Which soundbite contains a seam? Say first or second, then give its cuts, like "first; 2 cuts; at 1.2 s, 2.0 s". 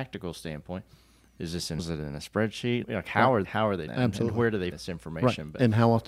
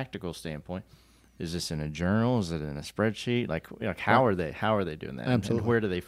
first; 5 cuts; at 1.8 s, 2.8 s, 3.4 s, 3.9 s, 4.7 s